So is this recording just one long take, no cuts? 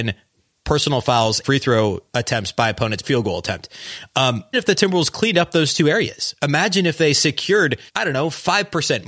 no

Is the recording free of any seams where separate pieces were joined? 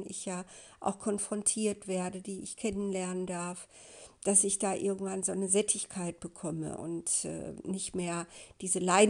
yes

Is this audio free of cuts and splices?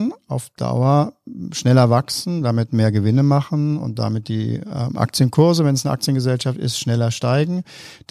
yes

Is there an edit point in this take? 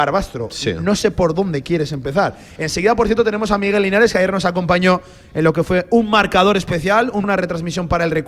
yes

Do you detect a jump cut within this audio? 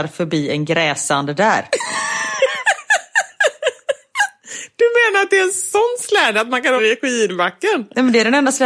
yes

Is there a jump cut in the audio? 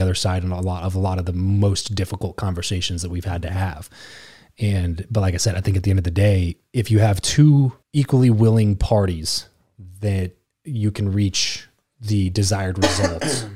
yes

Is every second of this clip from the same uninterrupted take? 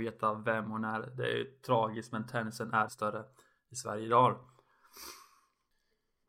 no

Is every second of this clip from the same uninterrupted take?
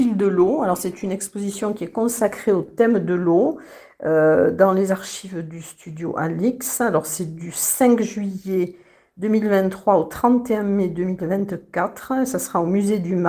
yes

